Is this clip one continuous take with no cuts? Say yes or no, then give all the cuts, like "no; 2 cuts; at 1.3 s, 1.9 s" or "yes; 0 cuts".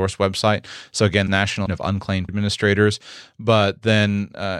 no; 3 cuts; at 1.3 s, 1.7 s, 2.3 s